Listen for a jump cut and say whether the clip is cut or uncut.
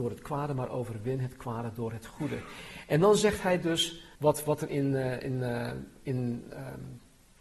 cut